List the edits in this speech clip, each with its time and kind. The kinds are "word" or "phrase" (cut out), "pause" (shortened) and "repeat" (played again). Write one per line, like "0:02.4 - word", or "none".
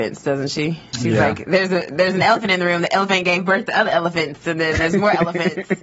none